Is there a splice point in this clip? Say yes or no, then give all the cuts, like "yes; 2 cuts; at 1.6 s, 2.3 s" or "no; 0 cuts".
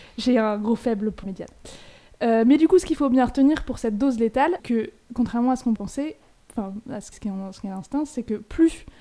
yes; 4 cuts; at 1.2 s, 4.6 s, 5.8 s, 7.1 s